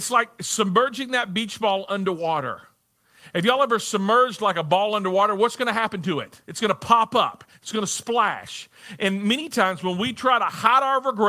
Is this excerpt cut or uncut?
cut